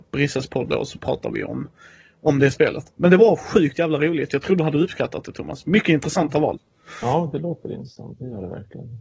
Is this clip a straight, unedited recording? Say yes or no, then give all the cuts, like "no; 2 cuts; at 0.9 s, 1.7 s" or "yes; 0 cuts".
yes; 0 cuts